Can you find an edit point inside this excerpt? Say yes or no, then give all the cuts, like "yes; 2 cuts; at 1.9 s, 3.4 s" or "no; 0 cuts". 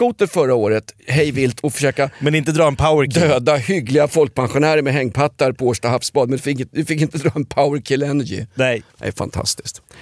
yes; 1 cut; at 8.9 s